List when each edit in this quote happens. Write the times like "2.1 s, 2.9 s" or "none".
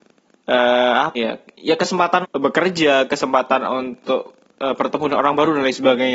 1.1 s, 2.2 s